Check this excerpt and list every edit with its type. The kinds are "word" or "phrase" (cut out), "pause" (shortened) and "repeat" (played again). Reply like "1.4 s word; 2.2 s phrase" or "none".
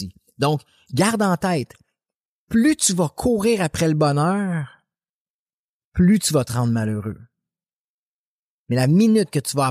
none